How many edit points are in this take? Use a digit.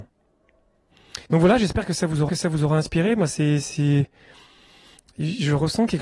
2